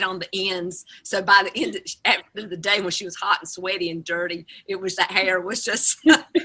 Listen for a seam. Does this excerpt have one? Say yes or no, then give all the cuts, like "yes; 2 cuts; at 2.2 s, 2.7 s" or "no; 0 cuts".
yes; 2 cuts; at 2.3 s, 4.9 s